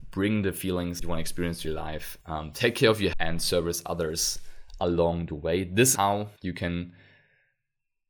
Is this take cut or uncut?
cut